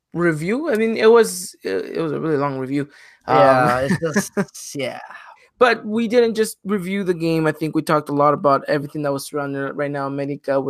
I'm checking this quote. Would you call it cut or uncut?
uncut